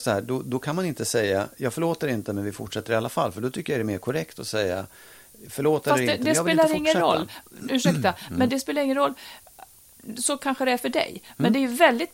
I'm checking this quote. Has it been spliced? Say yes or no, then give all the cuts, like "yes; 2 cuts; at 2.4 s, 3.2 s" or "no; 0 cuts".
no; 0 cuts